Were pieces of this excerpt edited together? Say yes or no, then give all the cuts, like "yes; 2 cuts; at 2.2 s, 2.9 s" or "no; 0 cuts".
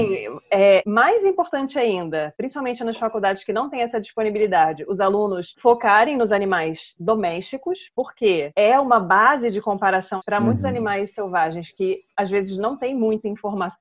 no; 0 cuts